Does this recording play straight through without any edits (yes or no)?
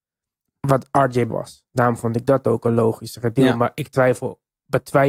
no